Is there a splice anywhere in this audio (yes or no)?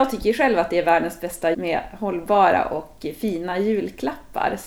yes